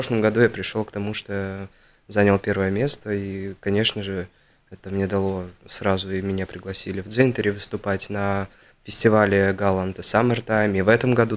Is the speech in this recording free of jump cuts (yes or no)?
yes